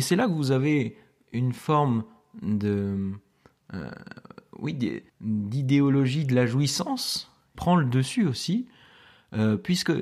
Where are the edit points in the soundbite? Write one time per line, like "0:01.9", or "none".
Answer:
0:05.1
0:07.5